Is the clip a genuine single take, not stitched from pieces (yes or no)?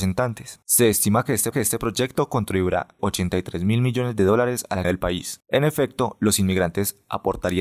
no